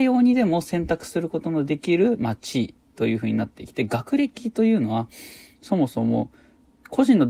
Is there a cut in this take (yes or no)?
no